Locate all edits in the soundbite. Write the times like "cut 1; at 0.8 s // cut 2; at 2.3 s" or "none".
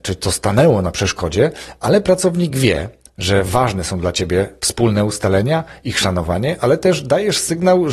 none